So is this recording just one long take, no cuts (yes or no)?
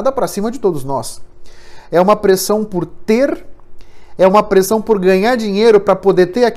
yes